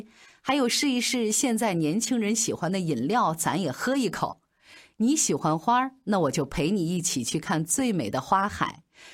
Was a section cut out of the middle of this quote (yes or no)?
no